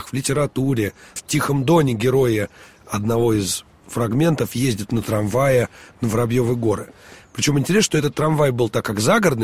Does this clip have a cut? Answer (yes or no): yes